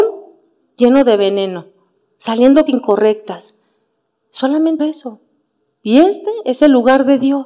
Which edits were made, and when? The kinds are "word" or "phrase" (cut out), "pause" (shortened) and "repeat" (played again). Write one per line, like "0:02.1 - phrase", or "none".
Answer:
0:02.7 - word
0:04.8 - word